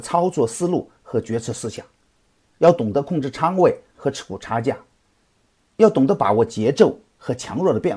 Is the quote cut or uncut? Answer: uncut